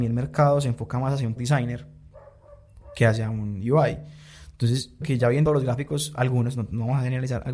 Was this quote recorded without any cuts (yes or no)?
no